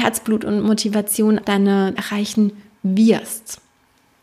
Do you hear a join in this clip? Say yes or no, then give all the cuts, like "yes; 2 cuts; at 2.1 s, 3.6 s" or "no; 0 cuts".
yes; 2 cuts; at 1.4 s, 2.0 s